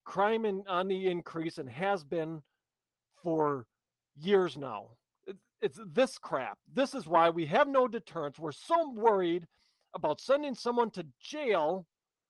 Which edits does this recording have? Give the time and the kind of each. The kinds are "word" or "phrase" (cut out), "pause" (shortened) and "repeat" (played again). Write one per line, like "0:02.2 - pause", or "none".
none